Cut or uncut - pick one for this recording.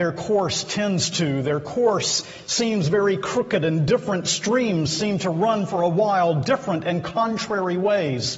uncut